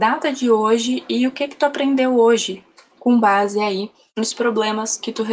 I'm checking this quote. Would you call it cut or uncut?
uncut